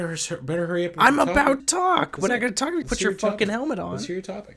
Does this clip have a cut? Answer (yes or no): yes